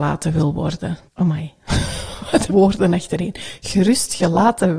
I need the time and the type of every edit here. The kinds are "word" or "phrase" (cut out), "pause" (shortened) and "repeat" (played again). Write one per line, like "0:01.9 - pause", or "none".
0:01.1 - pause
0:02.5 - word